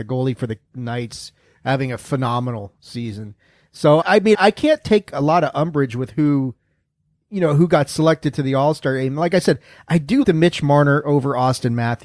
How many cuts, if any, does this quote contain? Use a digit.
3